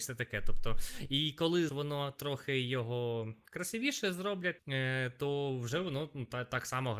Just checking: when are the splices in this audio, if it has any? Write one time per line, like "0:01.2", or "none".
0:01.7
0:04.6